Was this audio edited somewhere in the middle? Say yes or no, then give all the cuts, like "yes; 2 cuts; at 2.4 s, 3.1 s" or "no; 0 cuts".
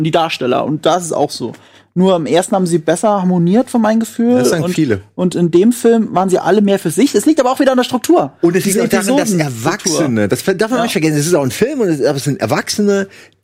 no; 0 cuts